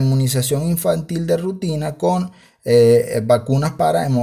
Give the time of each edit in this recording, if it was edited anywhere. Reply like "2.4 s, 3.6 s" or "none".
none